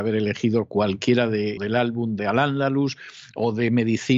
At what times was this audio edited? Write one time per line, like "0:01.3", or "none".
0:01.6
0:02.2